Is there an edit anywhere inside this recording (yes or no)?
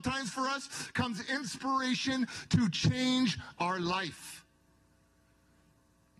no